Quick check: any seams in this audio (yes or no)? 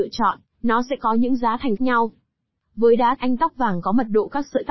yes